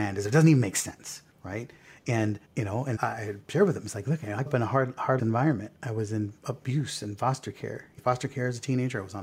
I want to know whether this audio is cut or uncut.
cut